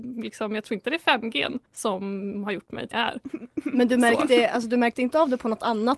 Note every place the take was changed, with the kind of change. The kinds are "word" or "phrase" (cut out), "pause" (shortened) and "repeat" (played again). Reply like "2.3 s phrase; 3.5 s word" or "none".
1.7 s pause; 2.9 s word